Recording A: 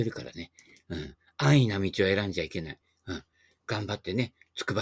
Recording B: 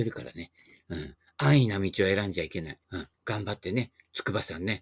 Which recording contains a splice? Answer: B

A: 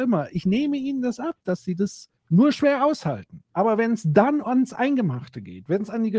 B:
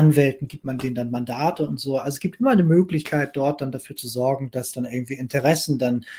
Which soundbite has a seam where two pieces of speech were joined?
A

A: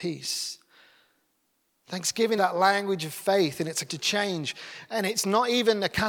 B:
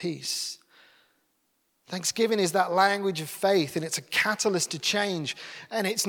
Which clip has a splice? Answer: A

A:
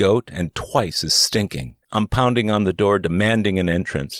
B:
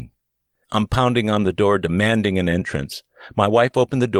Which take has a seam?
A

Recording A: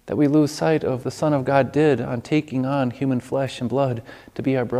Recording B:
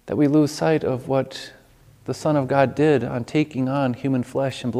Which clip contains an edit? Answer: A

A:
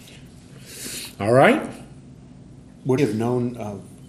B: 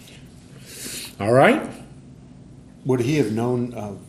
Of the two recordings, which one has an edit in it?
A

